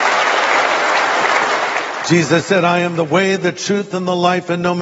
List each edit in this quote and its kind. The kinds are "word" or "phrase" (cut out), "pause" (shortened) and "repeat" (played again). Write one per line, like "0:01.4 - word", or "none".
none